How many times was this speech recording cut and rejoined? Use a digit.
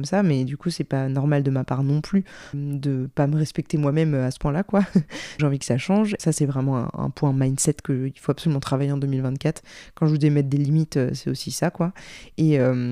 3